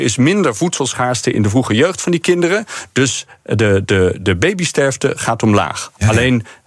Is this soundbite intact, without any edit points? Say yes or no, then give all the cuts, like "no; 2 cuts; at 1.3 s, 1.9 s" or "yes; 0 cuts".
yes; 0 cuts